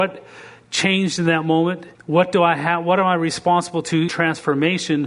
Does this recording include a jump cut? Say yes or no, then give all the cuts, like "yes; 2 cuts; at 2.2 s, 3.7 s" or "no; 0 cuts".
yes; 2 cuts; at 1.9 s, 4.1 s